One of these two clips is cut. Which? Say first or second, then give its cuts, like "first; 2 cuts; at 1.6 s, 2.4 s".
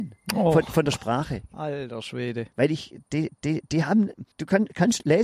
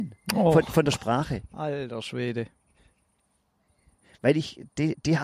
first; 3 cuts; at 2.5 s, 3.4 s, 4.3 s